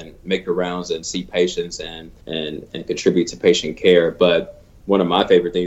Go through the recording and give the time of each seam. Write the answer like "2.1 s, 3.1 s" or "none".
2.2 s